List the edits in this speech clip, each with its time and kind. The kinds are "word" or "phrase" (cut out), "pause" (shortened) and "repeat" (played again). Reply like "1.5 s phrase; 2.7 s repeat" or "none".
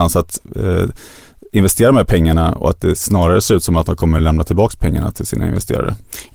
none